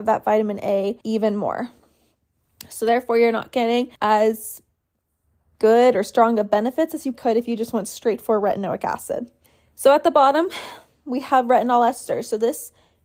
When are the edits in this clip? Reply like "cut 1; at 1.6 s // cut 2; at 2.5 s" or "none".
cut 1; at 1.0 s // cut 2; at 4.0 s // cut 3; at 7.1 s // cut 4; at 9.5 s